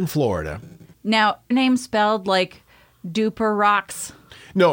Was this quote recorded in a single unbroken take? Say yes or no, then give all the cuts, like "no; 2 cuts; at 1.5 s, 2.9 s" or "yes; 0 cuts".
no; 1 cut; at 1.5 s